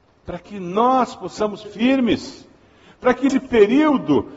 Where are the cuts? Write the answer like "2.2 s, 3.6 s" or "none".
1.6 s, 3.3 s